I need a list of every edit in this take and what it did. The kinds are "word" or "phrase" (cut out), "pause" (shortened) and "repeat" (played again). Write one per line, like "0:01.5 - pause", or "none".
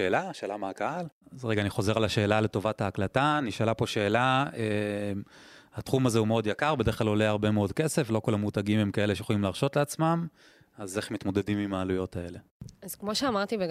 none